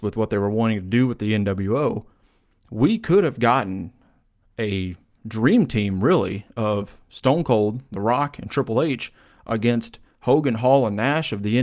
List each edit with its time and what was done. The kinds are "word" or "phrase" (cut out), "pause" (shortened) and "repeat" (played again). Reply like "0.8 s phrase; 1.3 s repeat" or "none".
none